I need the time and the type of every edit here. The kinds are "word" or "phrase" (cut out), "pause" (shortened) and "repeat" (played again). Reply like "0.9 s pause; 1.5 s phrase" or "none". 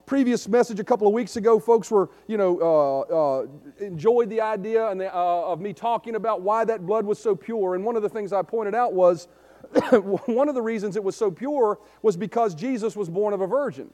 none